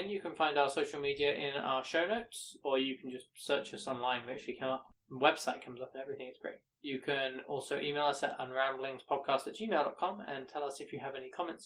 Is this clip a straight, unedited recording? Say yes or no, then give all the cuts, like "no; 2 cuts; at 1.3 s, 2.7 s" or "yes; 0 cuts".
yes; 0 cuts